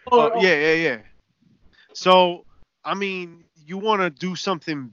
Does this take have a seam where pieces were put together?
no; 0 cuts

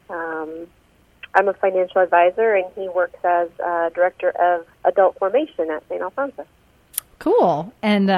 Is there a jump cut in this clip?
yes; 1 cut; at 4.7 s

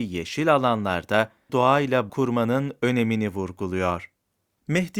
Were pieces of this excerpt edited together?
yes; 2 cuts; at 1.5 s, 2.1 s

